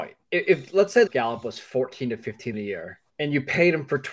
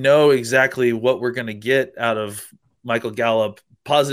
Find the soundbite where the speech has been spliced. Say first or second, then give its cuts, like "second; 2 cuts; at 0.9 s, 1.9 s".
first; 3 cuts; at 1.1 s, 2.5 s, 3.1 s